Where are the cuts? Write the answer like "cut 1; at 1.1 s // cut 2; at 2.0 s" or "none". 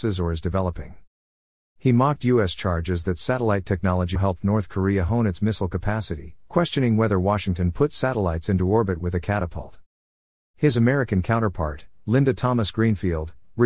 cut 1; at 4.1 s